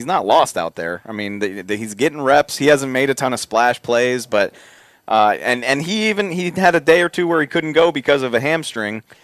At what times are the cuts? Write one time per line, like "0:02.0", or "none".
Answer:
none